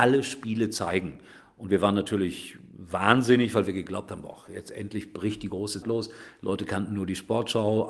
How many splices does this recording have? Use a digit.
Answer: 1